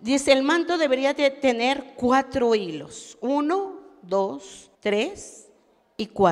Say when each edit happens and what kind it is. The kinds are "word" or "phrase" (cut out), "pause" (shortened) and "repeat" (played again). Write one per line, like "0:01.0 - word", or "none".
0:04.7 - pause